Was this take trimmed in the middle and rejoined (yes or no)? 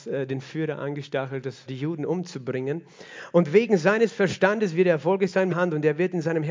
yes